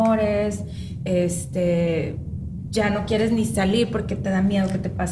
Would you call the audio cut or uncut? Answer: uncut